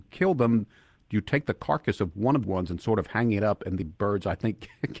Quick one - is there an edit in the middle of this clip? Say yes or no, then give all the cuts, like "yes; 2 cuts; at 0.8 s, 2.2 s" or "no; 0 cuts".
yes; 2 cuts; at 2.4 s, 3.8 s